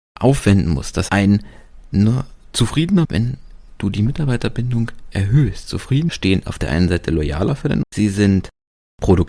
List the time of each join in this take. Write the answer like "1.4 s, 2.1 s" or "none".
1.1 s, 3.0 s, 5.1 s, 6.1 s, 7.8 s